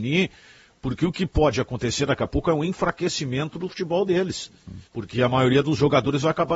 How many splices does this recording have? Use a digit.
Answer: 1